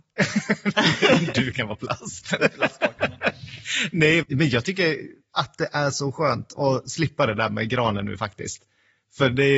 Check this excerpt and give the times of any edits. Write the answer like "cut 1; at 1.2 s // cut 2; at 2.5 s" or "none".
cut 1; at 4.2 s